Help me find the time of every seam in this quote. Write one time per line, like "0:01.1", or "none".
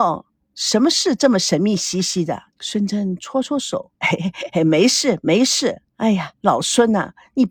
0:02.5
0:03.9
0:05.9